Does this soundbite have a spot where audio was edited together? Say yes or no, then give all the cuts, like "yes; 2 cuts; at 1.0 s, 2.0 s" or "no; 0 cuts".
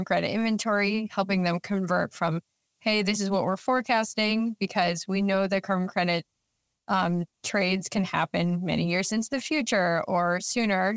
no; 0 cuts